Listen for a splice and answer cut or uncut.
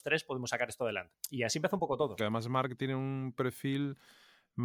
cut